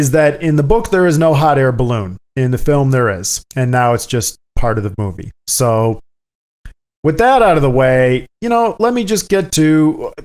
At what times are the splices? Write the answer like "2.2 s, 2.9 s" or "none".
2.2 s, 3.5 s, 4.4 s, 8.3 s

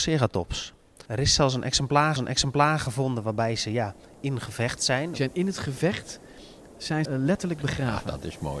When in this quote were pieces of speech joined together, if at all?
1.1 s, 2.2 s, 7.0 s

